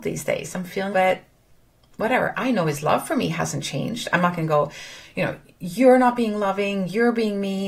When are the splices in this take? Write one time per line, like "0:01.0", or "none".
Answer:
0:00.9

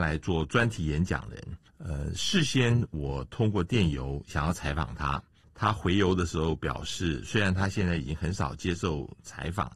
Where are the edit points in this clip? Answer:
0:01.7
0:05.4

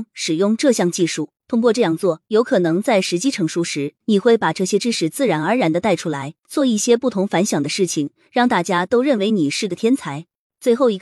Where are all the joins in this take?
0:01.4
0:04.0
0:06.4

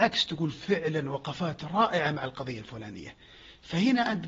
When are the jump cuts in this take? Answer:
none

